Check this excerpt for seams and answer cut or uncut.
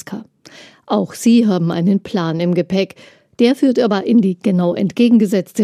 uncut